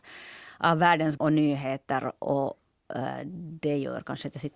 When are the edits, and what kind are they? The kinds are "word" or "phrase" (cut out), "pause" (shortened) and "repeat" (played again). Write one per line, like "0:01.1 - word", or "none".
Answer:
0:01.2 - word